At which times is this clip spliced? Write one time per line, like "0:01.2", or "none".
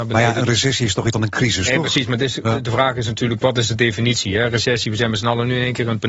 0:01.1